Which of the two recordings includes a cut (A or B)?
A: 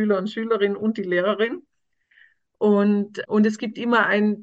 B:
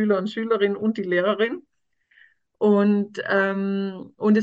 A